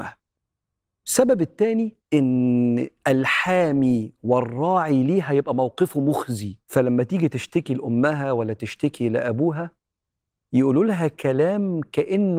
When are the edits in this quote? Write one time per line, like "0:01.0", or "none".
0:02.0
0:06.6